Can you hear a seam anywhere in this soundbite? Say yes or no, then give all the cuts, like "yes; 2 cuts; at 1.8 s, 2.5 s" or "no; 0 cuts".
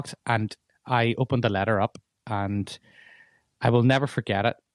no; 0 cuts